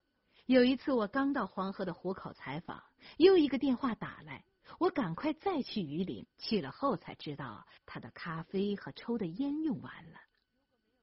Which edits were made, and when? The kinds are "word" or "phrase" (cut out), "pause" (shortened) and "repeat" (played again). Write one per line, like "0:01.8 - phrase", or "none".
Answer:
0:06.3 - pause
0:07.8 - pause